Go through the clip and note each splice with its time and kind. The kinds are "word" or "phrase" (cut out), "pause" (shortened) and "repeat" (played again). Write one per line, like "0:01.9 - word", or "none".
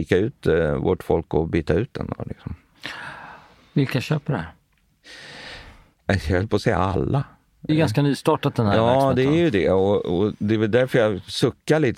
0:07.7 - word